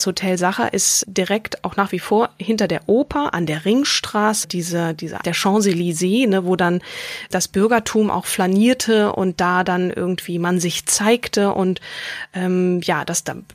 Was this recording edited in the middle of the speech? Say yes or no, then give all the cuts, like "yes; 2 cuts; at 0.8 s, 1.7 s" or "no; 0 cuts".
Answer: yes; 4 cuts; at 1.0 s, 4.4 s, 5.2 s, 7.3 s